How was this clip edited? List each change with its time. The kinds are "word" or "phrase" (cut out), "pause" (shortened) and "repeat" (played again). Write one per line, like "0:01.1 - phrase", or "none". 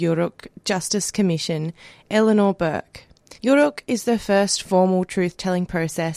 0:03.4 - pause